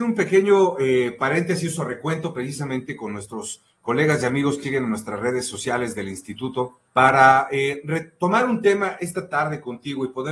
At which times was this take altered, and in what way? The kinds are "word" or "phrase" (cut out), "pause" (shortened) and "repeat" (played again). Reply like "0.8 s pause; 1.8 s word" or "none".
4.6 s word; 6.9 s pause